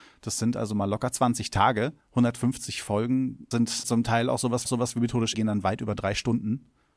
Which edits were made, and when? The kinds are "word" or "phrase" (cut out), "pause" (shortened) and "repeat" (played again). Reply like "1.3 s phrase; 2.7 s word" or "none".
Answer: 2.0 s pause; 3.5 s word; 3.8 s word; 4.6 s repeat; 5.3 s phrase